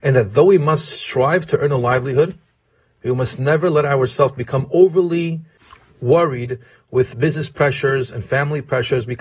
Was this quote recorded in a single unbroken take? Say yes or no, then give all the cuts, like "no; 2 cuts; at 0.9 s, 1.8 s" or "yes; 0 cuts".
yes; 0 cuts